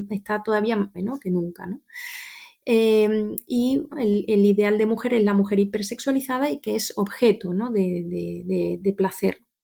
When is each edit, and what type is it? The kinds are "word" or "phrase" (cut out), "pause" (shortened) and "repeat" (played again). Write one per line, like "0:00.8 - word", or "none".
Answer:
0:00.9 - phrase
0:03.9 - word